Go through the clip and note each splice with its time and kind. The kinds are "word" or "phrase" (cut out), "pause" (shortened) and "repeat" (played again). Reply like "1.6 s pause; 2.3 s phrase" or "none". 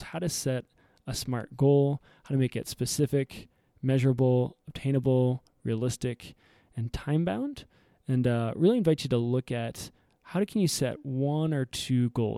none